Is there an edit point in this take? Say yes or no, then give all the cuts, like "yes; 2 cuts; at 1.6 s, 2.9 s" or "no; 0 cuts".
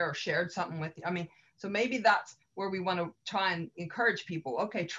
no; 0 cuts